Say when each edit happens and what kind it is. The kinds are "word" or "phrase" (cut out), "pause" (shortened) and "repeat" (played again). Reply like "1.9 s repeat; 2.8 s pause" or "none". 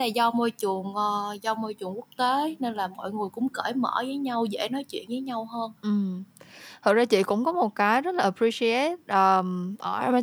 5.8 s pause